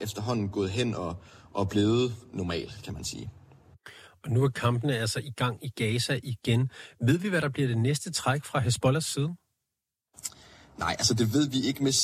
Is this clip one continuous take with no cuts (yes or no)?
yes